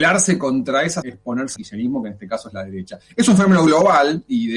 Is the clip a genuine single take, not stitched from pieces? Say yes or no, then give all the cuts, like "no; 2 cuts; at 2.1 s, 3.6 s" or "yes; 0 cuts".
no; 2 cuts; at 1.0 s, 1.6 s